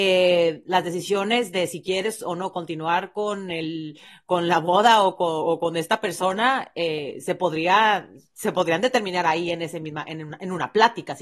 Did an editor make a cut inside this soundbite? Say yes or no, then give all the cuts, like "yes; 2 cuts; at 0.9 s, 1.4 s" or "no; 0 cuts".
no; 0 cuts